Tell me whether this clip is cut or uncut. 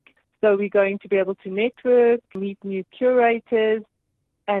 uncut